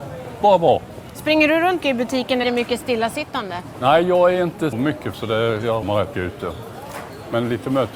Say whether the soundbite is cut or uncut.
cut